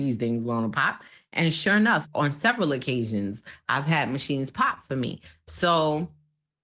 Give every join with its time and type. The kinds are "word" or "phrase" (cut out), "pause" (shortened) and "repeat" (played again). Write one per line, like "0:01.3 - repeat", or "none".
none